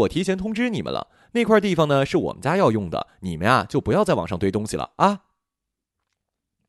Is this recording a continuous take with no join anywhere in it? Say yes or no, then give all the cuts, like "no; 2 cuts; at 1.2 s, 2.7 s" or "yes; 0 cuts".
yes; 0 cuts